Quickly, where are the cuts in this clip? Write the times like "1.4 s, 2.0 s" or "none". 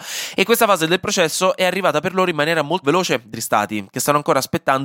2.8 s, 3.3 s